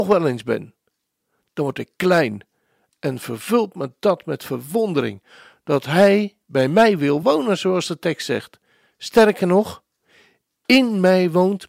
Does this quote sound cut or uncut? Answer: uncut